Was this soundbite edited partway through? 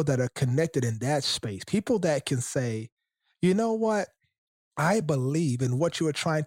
no; 0 cuts

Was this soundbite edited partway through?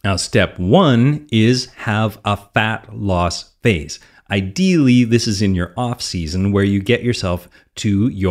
no; 0 cuts

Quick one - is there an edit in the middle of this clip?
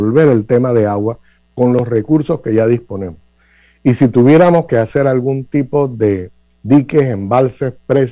no; 0 cuts

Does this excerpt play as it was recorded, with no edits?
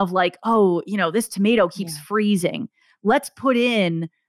yes; 0 cuts

